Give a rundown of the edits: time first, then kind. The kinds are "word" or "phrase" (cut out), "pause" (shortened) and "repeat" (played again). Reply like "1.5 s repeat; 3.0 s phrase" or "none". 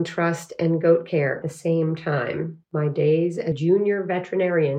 1.4 s word; 2.6 s pause; 3.5 s word